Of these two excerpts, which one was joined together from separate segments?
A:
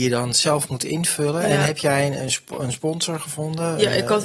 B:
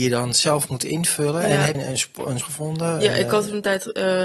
B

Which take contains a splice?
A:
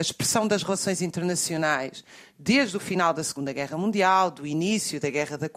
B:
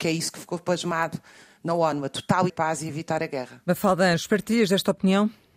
B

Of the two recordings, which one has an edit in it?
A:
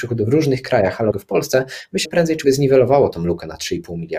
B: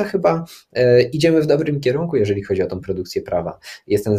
A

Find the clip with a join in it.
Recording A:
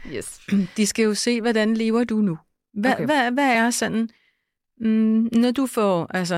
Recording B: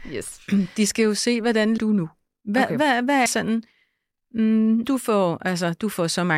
B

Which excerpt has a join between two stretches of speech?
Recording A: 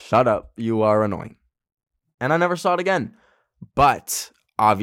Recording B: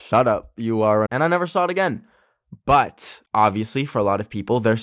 B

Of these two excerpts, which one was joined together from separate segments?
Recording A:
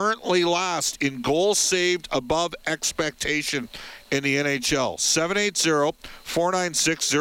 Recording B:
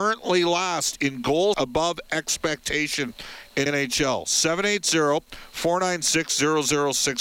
B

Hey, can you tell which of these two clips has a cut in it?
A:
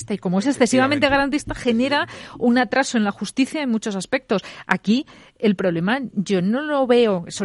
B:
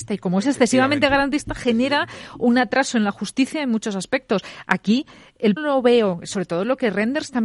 B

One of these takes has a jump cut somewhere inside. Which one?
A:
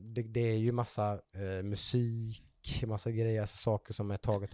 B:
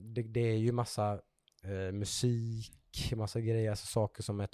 A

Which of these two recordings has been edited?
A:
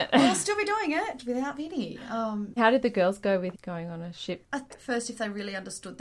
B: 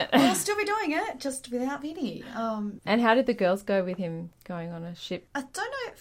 A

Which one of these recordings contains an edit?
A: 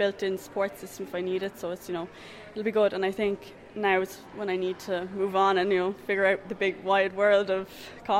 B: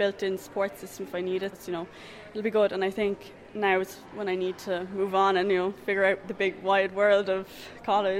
B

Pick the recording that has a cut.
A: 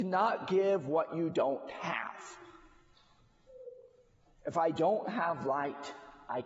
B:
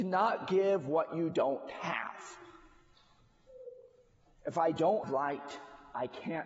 B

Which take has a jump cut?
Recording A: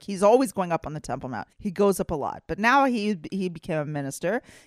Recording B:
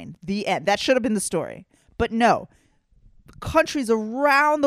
A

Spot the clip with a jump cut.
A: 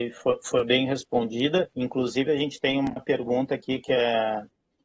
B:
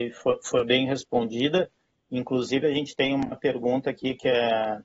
A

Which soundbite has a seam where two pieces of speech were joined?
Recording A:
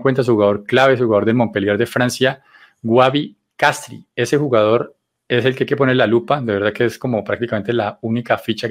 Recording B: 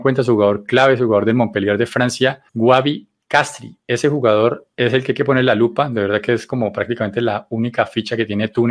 B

